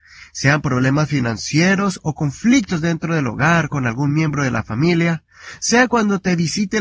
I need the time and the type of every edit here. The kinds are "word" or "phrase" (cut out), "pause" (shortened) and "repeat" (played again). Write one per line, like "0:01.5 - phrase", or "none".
none